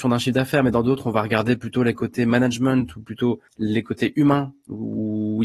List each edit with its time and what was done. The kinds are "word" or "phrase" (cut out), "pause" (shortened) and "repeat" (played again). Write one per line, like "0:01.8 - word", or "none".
0:03.5 - pause

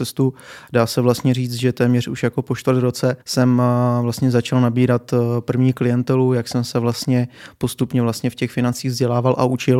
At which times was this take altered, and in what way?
0:03.2 - pause

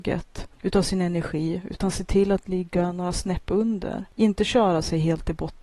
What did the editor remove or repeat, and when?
none

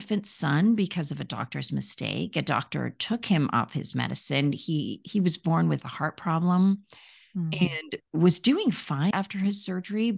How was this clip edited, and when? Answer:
0:09.1 - word

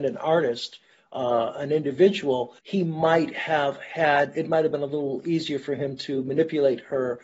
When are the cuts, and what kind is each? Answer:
0:02.6 - pause

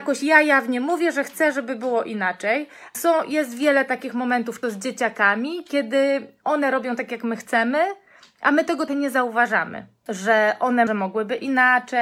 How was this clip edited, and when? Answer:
0:02.9 - word
0:04.6 - word
0:08.9 - word
0:10.9 - word

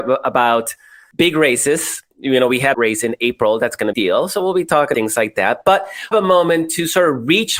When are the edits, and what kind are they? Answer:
0:02.1 - pause
0:02.7 - phrase
0:03.9 - phrase
0:04.9 - word
0:06.1 - phrase

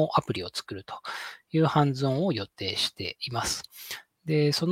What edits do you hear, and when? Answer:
none

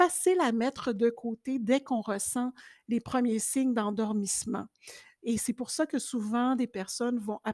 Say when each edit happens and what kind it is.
none

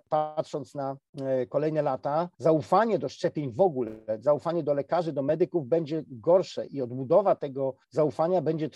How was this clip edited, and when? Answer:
0:02.3 - pause
0:07.8 - pause

